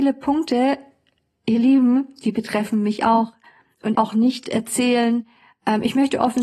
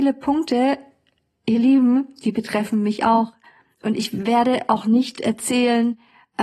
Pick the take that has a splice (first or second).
first